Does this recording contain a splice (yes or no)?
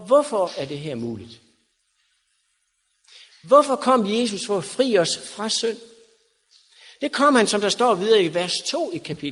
no